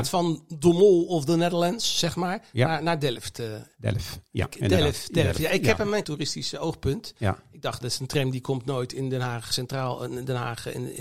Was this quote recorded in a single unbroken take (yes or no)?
no